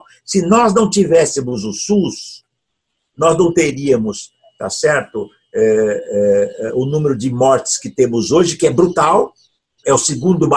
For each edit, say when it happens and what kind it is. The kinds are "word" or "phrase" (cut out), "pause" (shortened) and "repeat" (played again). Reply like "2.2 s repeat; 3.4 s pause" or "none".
none